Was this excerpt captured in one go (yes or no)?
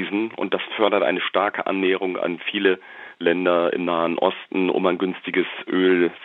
yes